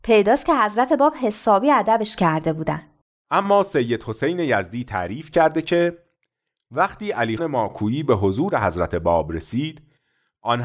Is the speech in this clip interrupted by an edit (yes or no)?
yes